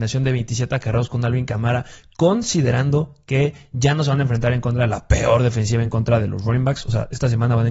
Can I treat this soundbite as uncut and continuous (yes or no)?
yes